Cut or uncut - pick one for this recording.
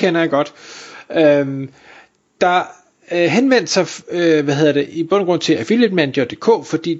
uncut